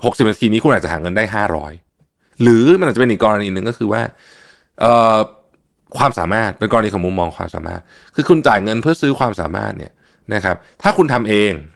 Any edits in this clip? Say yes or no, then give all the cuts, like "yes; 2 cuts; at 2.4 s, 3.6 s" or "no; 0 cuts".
no; 0 cuts